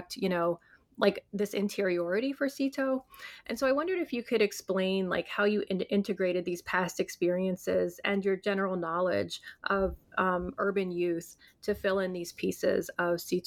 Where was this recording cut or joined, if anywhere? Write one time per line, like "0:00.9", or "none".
none